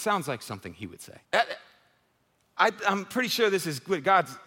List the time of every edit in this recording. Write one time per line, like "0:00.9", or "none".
0:01.2